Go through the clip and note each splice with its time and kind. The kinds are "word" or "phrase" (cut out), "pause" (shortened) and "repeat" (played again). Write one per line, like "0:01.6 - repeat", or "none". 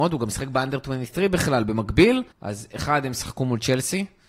0:02.3 - pause